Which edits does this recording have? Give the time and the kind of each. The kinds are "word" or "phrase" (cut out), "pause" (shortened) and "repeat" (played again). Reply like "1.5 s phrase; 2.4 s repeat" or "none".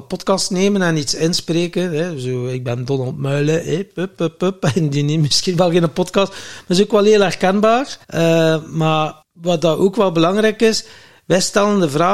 8.0 s pause; 9.2 s pause